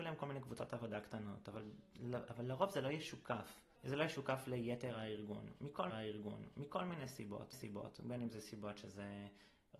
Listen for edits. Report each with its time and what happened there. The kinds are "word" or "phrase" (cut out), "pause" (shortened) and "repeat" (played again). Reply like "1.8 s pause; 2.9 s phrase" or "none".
3.7 s pause; 5.9 s repeat; 7.5 s repeat